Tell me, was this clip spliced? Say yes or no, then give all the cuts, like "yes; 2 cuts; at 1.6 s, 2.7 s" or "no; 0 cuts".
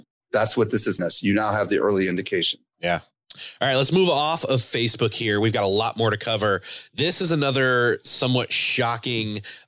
yes; 1 cut; at 1.0 s